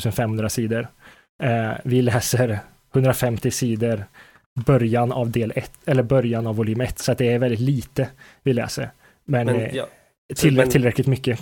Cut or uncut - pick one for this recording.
uncut